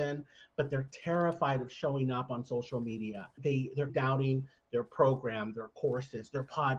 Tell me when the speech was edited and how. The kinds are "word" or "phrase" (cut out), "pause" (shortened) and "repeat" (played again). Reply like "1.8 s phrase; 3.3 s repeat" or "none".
3.4 s word; 3.9 s word